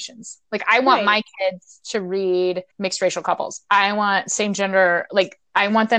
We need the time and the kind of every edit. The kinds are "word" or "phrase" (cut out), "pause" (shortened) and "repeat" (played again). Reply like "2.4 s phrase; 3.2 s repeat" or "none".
2.7 s pause